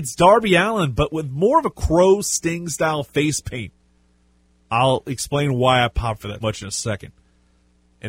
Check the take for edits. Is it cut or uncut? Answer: cut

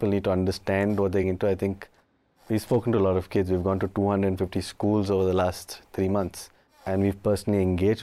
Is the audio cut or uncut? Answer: cut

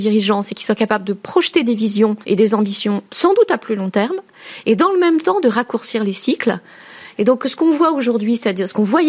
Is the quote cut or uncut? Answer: cut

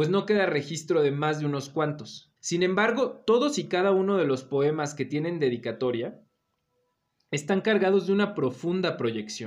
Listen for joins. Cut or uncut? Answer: cut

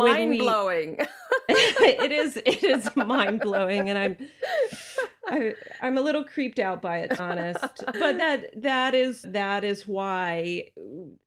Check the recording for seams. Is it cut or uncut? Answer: cut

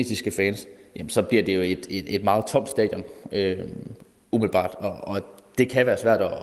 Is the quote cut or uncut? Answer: uncut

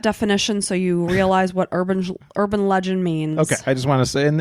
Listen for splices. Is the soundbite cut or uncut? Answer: uncut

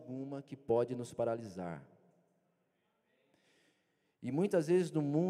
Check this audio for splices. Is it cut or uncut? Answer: uncut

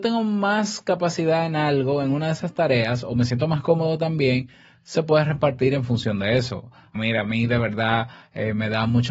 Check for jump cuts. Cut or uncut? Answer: cut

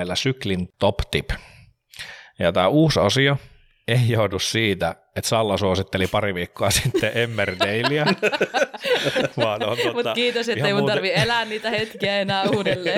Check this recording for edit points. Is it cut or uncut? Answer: uncut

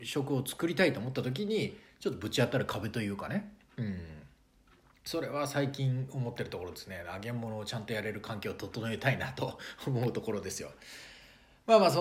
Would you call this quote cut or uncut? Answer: uncut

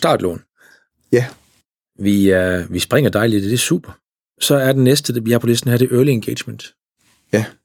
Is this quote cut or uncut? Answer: uncut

